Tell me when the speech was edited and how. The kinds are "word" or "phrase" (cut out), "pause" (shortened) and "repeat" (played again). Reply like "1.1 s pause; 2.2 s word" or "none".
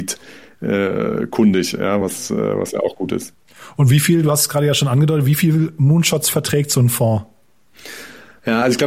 none